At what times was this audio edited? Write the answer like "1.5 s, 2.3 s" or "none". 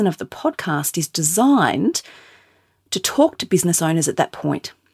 none